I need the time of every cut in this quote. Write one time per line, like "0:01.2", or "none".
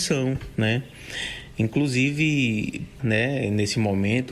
0:03.0